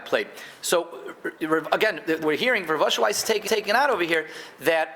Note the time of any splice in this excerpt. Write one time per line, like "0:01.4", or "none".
0:02.2
0:03.5